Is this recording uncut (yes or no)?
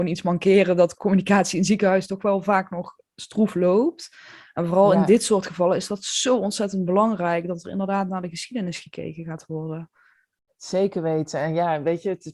yes